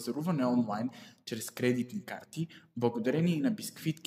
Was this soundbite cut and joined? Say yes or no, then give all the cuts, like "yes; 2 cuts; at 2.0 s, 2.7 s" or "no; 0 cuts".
no; 0 cuts